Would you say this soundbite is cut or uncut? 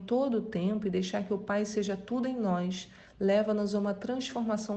uncut